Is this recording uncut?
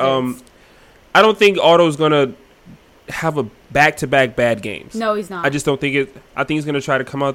yes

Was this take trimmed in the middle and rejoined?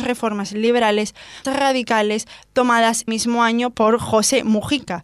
yes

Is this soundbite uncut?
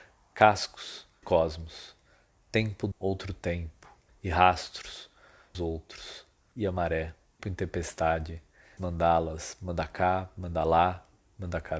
no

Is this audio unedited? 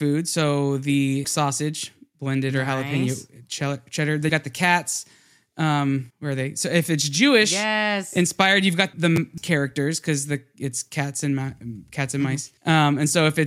no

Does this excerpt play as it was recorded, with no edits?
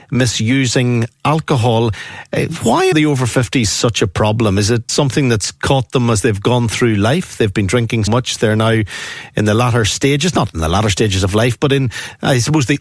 no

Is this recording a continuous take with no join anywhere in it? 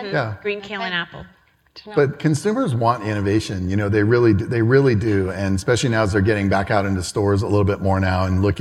yes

